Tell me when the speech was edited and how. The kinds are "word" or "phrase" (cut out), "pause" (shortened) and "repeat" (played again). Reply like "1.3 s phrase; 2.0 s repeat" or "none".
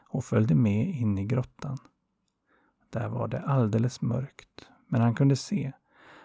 none